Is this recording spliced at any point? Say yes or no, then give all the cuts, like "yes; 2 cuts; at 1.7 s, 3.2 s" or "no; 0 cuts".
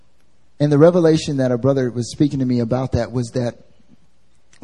no; 0 cuts